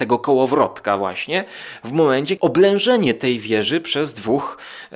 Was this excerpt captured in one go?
no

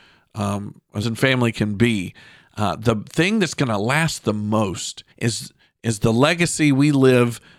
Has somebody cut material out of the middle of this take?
yes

